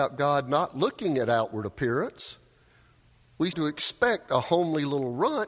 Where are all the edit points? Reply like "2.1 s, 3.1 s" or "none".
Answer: 3.5 s